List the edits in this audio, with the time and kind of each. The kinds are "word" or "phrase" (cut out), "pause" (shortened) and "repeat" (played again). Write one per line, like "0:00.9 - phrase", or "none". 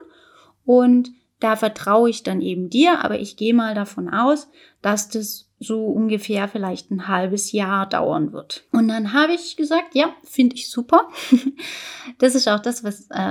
0:08.7 - pause